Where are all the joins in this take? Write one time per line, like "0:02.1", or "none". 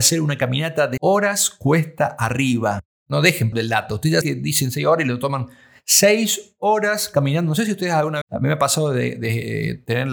0:01.0
0:03.5
0:04.2
0:08.2